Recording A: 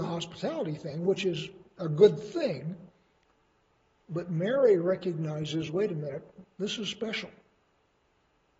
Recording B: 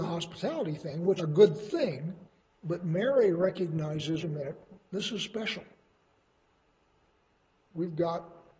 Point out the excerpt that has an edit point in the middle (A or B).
B